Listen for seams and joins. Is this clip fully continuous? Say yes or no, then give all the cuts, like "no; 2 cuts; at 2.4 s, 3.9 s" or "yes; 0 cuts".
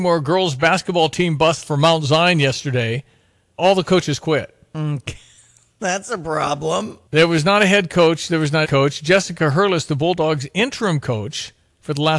no; 4 cuts; at 1.6 s, 3.6 s, 7.1 s, 8.6 s